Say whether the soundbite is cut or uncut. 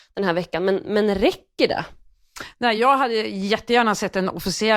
uncut